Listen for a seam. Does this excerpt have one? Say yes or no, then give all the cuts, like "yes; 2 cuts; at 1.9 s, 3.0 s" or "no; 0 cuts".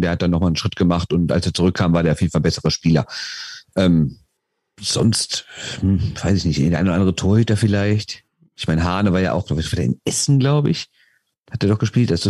no; 0 cuts